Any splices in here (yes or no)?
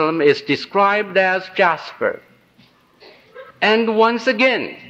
yes